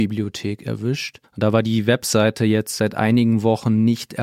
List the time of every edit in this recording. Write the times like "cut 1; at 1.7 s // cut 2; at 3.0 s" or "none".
cut 1; at 1.2 s